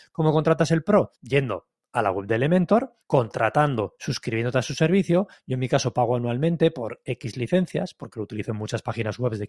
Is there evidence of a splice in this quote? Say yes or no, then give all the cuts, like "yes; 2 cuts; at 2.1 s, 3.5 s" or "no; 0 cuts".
yes; 2 cuts; at 1.2 s, 3.0 s